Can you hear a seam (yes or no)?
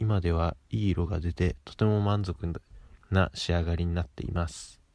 no